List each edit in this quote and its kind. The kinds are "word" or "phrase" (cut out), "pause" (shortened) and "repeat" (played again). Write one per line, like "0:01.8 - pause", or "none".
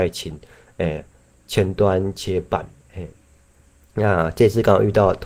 none